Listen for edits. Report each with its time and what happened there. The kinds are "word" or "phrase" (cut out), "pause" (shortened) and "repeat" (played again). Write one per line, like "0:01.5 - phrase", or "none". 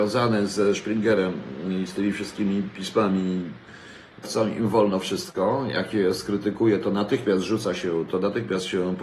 0:04.2 - phrase